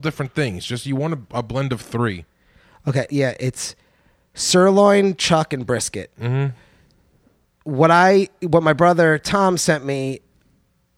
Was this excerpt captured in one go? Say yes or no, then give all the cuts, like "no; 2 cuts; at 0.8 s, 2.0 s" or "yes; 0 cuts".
no; 1 cut; at 3.1 s